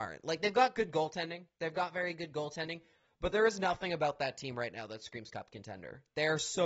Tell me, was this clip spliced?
no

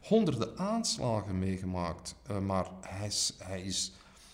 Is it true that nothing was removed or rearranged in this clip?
yes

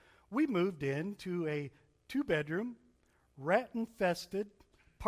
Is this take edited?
no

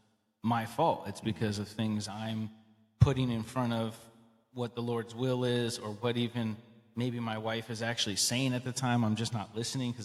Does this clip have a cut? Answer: no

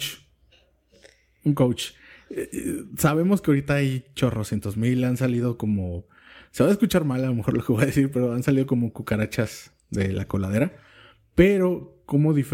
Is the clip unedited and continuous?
yes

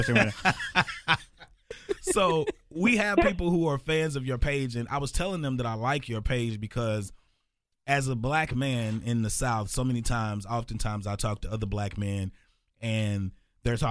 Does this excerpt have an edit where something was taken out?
no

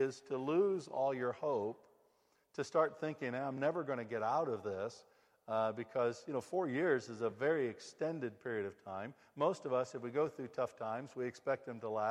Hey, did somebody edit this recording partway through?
no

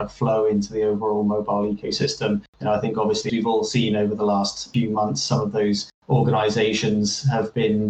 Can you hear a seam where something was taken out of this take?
yes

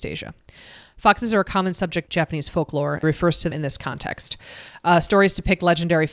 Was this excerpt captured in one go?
no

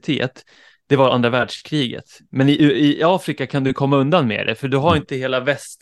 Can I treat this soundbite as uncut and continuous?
yes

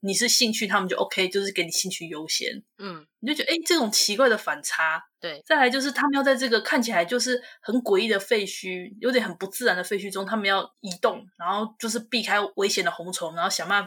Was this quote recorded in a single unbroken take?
no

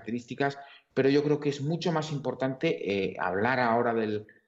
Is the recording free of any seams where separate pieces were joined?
yes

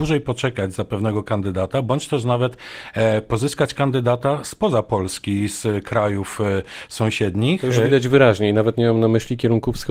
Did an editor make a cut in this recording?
no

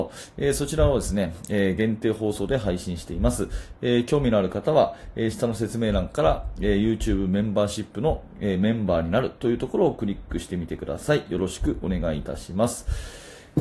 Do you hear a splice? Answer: no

